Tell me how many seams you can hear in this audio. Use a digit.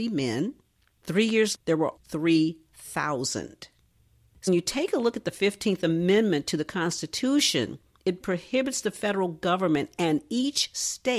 4